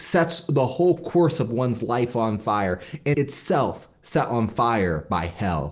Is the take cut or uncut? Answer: cut